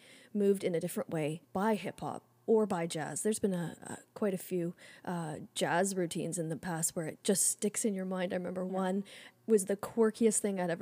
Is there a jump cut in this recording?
yes; 1 cut; at 1.4 s

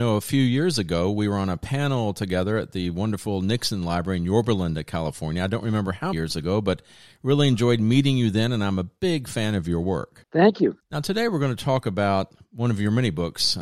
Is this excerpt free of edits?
no; 1 cut; at 6.1 s

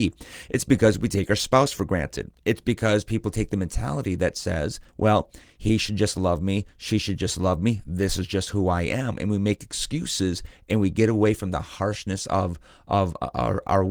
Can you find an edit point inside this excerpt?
yes; 1 cut; at 4.9 s

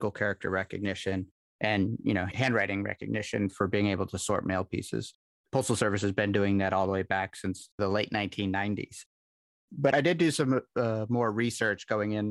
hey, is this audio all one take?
yes; 0 cuts

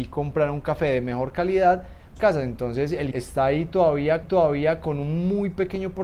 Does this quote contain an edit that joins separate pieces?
yes; 3 cuts; at 2.2 s, 3.1 s, 4.2 s

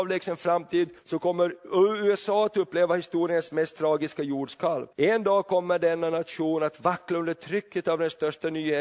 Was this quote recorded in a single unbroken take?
no; 2 cuts; at 1.0 s, 4.9 s

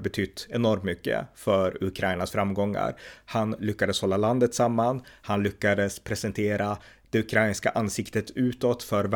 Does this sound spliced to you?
no; 0 cuts

